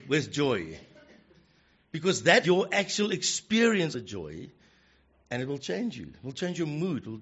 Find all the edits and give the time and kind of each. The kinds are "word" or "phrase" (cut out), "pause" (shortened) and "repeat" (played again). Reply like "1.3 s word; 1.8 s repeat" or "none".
2.4 s word; 3.9 s word